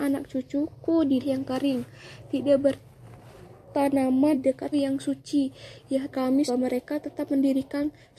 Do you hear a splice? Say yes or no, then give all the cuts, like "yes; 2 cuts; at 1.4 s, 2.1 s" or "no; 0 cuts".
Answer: yes; 5 cuts; at 1.2 s, 4.3 s, 4.7 s, 6.1 s, 6.5 s